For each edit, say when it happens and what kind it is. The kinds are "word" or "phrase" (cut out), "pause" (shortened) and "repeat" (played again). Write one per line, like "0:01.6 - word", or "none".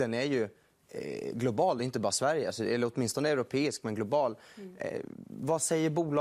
none